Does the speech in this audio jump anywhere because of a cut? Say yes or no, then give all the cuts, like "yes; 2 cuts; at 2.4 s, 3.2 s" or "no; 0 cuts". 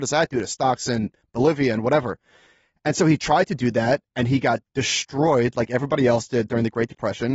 no; 0 cuts